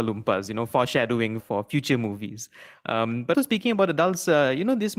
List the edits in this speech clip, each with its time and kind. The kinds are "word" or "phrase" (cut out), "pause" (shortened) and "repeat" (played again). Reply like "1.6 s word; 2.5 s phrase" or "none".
1.4 s word; 3.3 s word